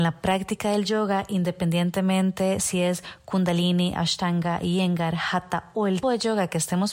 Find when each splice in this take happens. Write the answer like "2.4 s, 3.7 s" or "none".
6.0 s